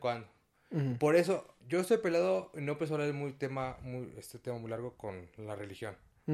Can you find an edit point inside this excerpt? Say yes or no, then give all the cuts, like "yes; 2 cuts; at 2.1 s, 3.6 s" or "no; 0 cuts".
yes; 1 cut; at 1.6 s